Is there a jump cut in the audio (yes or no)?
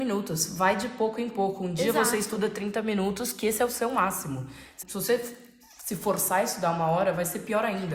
yes